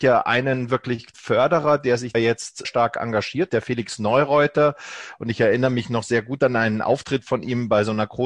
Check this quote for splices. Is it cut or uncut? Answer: cut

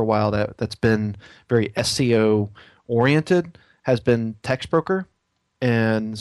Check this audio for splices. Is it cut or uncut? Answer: uncut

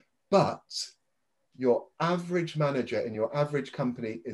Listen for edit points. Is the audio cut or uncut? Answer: uncut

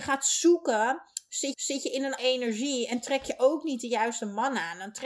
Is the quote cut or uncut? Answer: cut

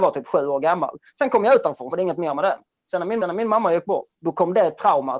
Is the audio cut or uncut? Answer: cut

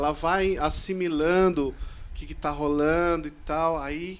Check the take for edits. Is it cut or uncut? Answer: uncut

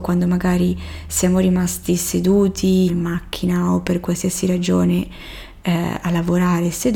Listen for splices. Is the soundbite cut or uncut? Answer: cut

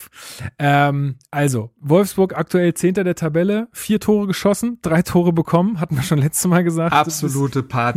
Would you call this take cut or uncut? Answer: uncut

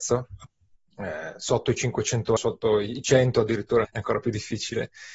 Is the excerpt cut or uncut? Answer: cut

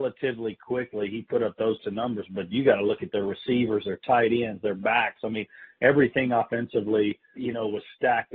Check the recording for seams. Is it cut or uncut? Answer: cut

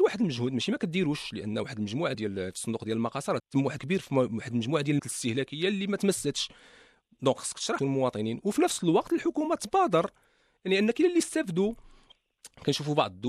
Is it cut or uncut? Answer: cut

